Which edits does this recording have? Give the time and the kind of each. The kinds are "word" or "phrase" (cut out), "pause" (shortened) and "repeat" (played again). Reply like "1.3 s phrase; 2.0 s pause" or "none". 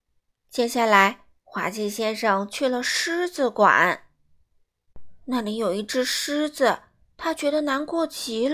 5.2 s pause